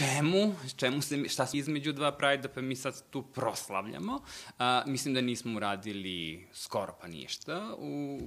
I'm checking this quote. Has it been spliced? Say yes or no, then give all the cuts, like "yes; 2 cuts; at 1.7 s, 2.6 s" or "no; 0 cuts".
yes; 1 cut; at 1.5 s